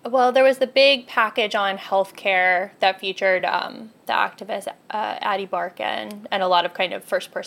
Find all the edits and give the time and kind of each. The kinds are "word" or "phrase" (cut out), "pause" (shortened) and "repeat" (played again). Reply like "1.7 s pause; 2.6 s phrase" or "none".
none

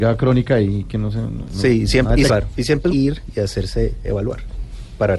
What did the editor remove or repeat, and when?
2.3 s word; 2.9 s phrase

